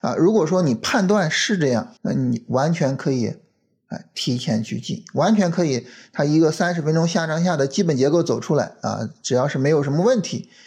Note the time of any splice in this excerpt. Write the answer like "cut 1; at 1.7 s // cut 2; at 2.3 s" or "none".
cut 1; at 2.0 s